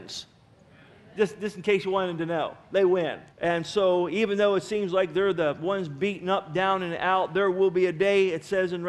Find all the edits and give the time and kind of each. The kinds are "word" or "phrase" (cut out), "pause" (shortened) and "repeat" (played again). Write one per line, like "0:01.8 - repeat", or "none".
0:03.3 - pause

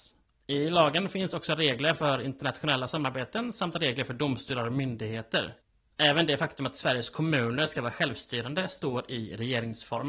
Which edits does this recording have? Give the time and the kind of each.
none

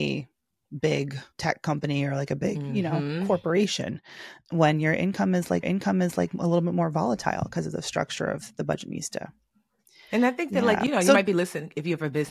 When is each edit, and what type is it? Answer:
0:01.3 - pause
0:05.6 - repeat

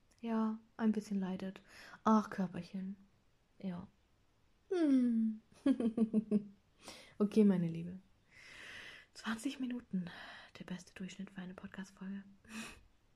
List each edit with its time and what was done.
none

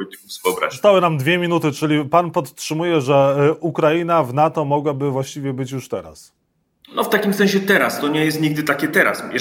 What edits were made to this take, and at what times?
0:06.4 - pause

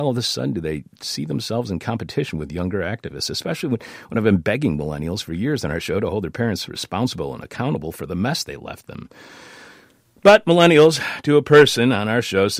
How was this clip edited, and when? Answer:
none

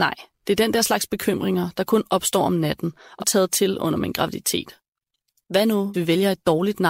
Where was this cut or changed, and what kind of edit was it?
0:03.2 - word
0:05.9 - word

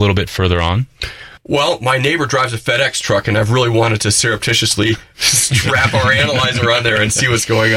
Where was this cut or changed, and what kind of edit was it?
0:01.4 - pause

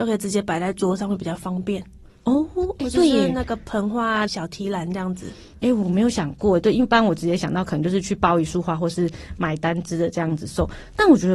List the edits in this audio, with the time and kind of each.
0:02.1 - pause
0:04.3 - phrase

